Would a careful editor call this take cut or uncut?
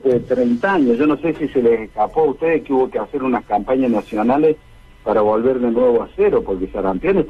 uncut